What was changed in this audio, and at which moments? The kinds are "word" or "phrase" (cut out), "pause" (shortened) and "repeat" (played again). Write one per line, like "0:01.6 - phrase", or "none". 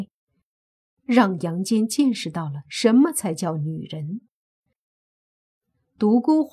none